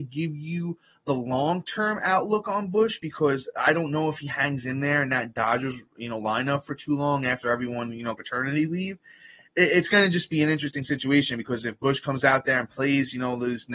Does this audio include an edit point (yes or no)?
yes